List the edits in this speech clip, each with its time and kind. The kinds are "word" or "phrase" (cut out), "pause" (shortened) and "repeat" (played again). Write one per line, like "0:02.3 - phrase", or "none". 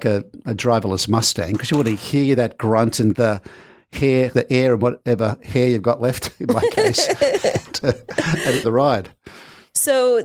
0:03.1 - word
0:04.3 - word
0:08.6 - word